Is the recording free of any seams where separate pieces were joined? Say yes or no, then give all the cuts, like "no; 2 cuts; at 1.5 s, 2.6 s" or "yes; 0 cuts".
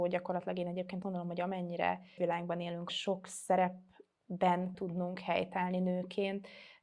no; 4 cuts; at 1.0 s, 2.2 s, 2.9 s, 4.7 s